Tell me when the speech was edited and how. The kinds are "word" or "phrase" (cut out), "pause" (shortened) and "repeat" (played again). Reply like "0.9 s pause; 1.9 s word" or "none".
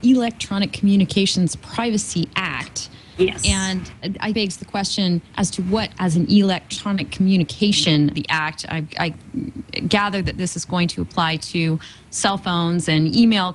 4.3 s phrase; 5.3 s pause; 6.0 s word; 8.1 s word